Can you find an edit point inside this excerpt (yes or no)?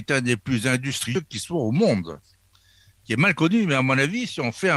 no